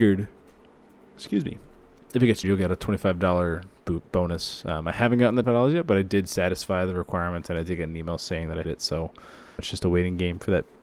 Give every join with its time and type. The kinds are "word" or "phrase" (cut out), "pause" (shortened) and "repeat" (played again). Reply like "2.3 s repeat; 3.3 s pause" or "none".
2.4 s word; 5.4 s word; 8.6 s word; 9.6 s word